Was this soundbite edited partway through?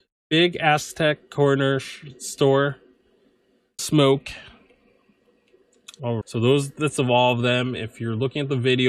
yes; 3 cuts; at 3.8 s, 6.2 s, 7.0 s

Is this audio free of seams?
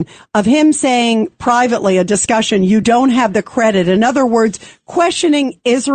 yes; 0 cuts

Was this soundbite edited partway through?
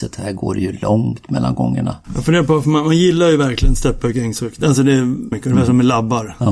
yes; 1 cut; at 5.3 s

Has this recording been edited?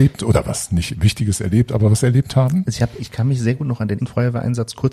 yes; 2 cuts; at 3.0 s, 4.0 s

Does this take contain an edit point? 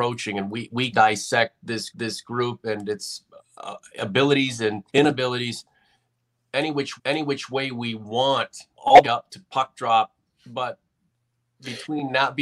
yes; 8 cuts; at 0.9 s, 1.9 s, 3.4 s, 4.9 s, 7.0 s, 8.7 s, 9.0 s, 10.3 s

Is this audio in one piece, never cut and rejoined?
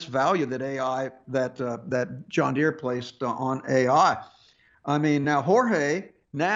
yes; 0 cuts

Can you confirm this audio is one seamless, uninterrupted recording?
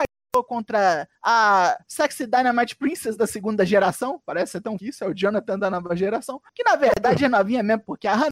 no; 3 cuts; at 1.2 s, 4.8 s, 6.5 s

